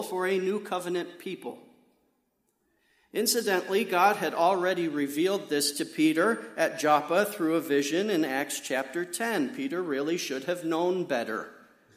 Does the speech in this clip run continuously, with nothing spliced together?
yes; 0 cuts

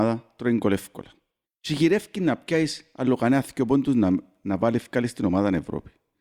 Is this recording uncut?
no; 1 cut; at 1.4 s

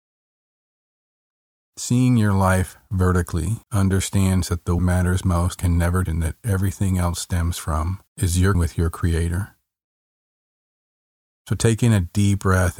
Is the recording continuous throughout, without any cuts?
no; 7 cuts; at 3.6 s, 4.8 s, 5.6 s, 6.1 s, 7.6 s, 8.1 s, 8.5 s

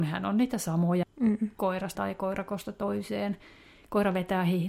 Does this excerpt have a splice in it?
yes; 2 cuts; at 1.0 s, 1.9 s

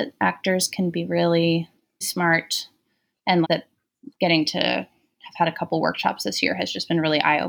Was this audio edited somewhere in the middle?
yes; 2 cuts; at 2.0 s, 3.4 s

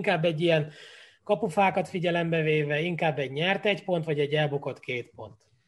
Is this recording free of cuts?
yes; 0 cuts

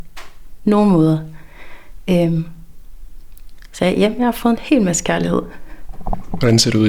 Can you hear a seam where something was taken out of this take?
no; 0 cuts

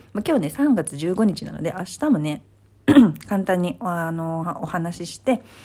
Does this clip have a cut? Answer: no; 0 cuts

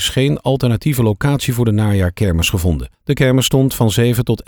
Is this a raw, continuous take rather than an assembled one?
no; 1 cut; at 2.9 s

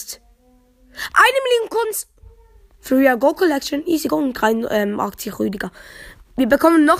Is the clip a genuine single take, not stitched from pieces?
yes; 0 cuts

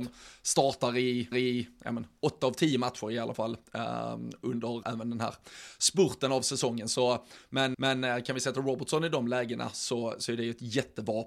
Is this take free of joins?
no; 3 cuts; at 1.3 s, 4.8 s, 7.7 s

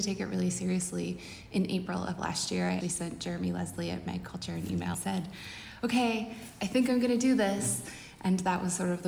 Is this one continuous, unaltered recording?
no; 2 cuts; at 2.8 s, 4.9 s

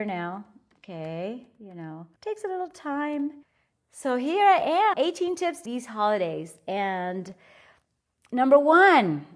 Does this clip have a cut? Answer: yes; 4 cuts; at 2.2 s, 3.4 s, 4.9 s, 5.7 s

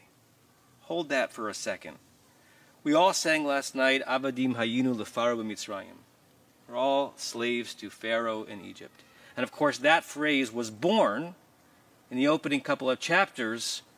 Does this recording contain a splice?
no; 0 cuts

